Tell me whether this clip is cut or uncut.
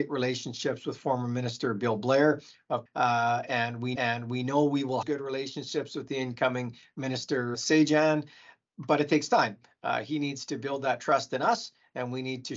cut